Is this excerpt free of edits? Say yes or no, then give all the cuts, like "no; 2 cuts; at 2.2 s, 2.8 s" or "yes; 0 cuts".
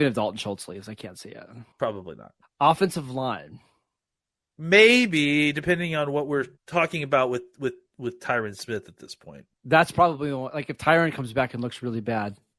no; 4 cuts; at 1.7 s, 2.4 s, 6.6 s, 9.5 s